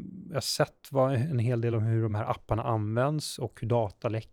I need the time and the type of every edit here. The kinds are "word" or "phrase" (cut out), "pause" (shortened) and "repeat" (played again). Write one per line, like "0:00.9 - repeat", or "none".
none